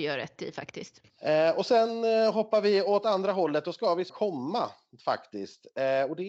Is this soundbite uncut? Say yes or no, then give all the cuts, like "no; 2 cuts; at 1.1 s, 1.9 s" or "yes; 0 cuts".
no; 2 cuts; at 1.1 s, 4.1 s